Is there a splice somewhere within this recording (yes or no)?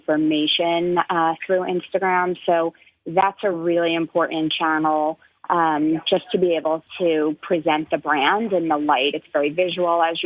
no